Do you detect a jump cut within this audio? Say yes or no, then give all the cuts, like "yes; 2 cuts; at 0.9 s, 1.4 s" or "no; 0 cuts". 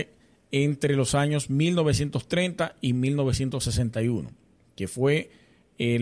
no; 0 cuts